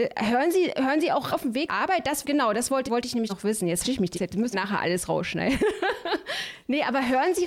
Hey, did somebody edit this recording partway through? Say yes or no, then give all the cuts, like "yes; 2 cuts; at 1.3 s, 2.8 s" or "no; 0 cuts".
yes; 8 cuts; at 1.3 s, 1.7 s, 2.2 s, 2.9 s, 3.3 s, 3.8 s, 4.1 s, 4.5 s